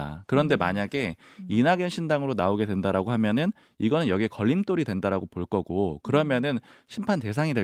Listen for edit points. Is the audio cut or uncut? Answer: uncut